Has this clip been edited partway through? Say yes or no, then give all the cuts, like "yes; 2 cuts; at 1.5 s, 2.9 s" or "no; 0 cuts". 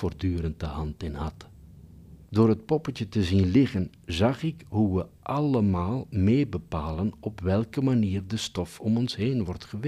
yes; 1 cut; at 2.2 s